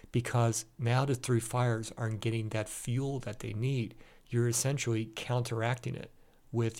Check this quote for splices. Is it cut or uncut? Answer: uncut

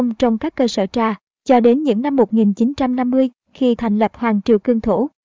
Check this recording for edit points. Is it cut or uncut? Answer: cut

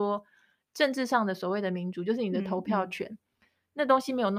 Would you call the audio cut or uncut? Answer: uncut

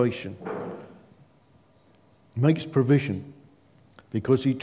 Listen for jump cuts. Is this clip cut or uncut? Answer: uncut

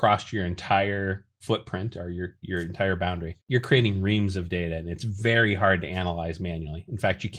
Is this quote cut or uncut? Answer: cut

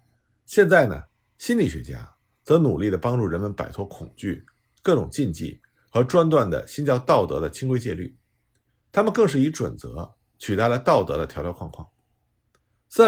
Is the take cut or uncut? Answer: uncut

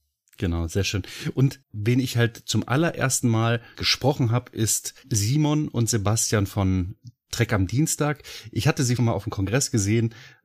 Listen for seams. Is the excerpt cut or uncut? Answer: cut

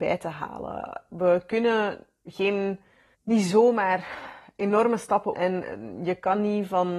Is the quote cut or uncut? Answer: cut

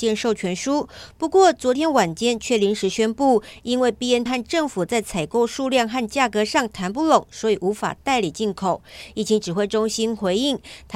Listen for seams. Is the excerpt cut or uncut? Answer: cut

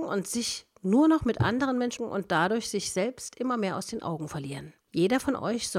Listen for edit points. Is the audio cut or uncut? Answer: cut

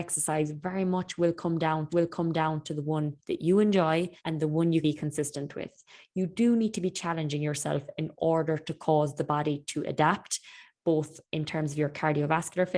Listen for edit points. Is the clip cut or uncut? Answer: cut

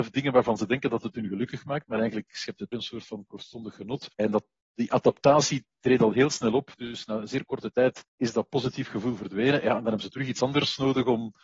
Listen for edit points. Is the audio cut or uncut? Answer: cut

